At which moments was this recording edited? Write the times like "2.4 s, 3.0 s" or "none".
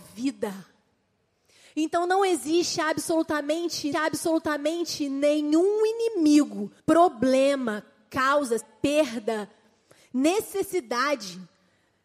3.9 s, 6.8 s, 8.6 s